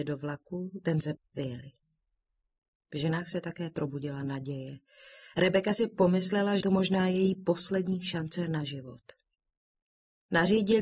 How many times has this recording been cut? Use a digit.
2